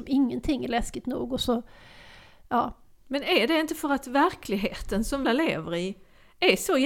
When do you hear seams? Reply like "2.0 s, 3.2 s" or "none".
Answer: 5.2 s